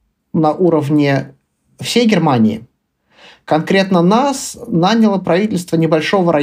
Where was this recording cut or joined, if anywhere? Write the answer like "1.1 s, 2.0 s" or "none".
none